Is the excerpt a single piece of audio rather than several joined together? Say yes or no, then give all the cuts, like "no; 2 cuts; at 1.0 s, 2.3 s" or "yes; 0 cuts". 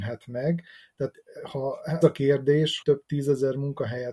no; 2 cuts; at 2.0 s, 2.8 s